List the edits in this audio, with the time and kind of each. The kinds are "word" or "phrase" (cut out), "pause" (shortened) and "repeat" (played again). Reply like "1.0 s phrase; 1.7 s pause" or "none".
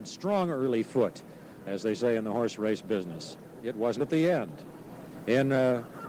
3.6 s word; 4.0 s word